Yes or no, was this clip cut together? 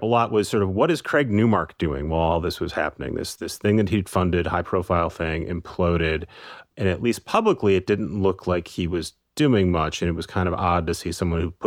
yes